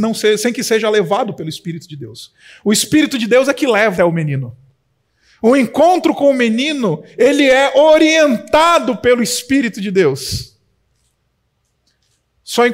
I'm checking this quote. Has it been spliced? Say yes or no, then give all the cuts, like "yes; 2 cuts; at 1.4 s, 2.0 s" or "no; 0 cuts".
yes; 1 cut; at 4.0 s